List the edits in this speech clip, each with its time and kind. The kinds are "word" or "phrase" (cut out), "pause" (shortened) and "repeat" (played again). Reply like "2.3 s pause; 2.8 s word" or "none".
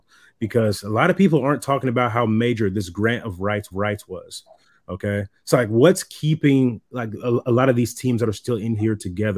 3.7 s repeat